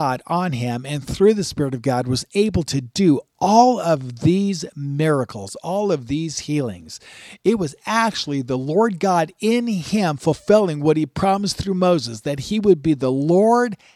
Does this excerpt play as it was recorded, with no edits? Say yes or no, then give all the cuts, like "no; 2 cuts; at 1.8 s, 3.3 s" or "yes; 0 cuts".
yes; 0 cuts